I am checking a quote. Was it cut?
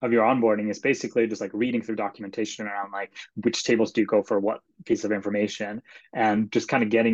no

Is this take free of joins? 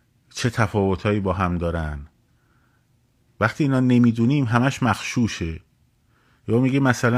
yes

